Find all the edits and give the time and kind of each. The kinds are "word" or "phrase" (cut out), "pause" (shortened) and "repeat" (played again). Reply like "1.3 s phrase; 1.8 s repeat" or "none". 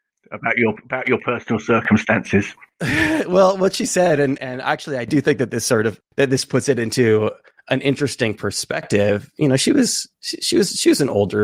4.4 s word; 6.1 s pause; 10.1 s pause